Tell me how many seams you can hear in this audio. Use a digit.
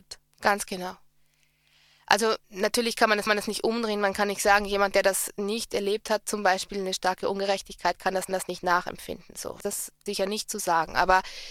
5